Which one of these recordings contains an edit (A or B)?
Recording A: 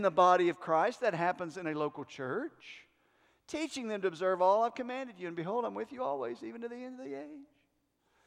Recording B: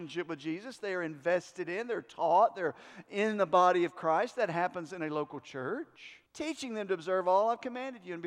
B